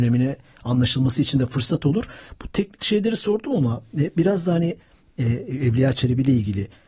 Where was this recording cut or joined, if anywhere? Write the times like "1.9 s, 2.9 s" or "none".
none